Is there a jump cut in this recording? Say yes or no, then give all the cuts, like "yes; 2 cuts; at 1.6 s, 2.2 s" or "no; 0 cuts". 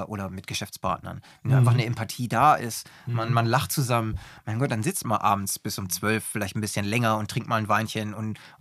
yes; 1 cut; at 5.0 s